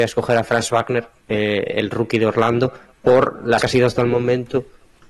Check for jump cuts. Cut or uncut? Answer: cut